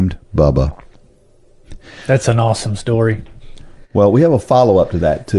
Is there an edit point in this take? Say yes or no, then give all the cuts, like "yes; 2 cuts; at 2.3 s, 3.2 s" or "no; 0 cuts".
no; 0 cuts